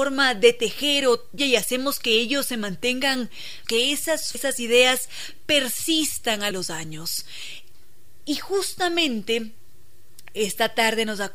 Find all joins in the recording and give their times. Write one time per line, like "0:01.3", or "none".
0:01.4
0:03.6
0:04.3
0:06.5